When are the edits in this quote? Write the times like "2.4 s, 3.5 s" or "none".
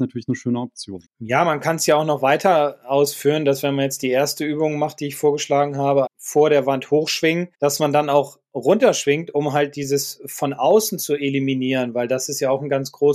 1.0 s, 6.1 s, 7.5 s